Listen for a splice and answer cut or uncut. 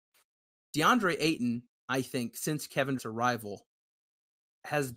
cut